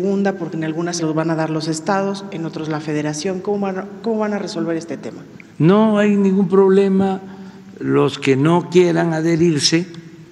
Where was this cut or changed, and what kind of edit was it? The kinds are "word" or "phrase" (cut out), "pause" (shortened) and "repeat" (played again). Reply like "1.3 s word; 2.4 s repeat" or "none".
1.0 s word; 5.5 s pause